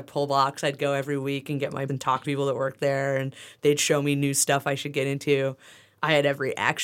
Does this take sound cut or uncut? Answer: cut